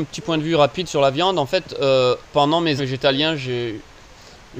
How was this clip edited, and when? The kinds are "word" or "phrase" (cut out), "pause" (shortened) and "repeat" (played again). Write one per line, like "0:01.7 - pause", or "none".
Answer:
0:02.3 - pause
0:02.8 - phrase